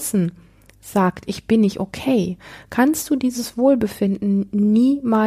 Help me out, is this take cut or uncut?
uncut